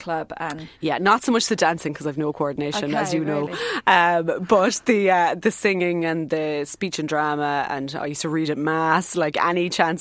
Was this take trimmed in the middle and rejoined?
no; 0 cuts

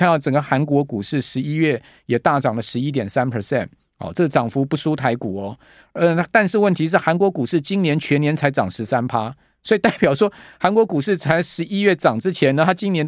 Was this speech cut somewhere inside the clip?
no; 0 cuts

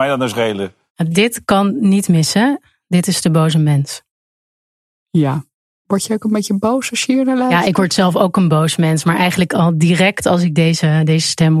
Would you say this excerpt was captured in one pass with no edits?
yes; 0 cuts

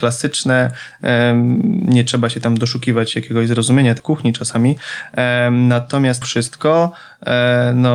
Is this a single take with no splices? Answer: no; 2 cuts; at 4.0 s, 6.2 s

